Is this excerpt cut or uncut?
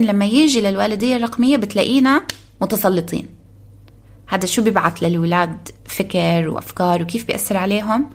uncut